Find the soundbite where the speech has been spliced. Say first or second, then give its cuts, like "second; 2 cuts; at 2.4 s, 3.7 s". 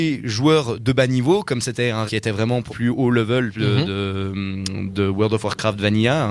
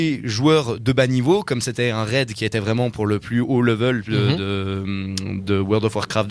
first; 2 cuts; at 2.1 s, 2.7 s